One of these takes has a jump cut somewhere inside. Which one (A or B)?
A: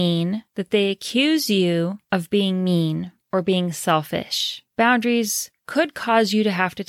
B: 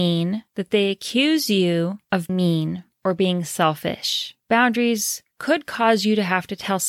B